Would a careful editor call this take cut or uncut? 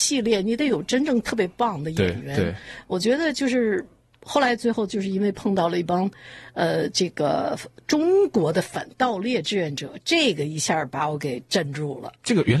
uncut